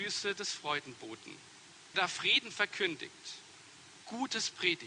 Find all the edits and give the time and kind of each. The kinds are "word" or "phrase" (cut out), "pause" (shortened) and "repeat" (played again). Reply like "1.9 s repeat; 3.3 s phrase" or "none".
1.9 s word